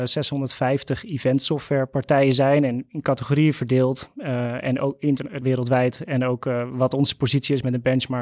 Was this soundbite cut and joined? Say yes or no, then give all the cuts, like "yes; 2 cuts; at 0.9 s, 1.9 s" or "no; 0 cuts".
yes; 1 cut; at 5.4 s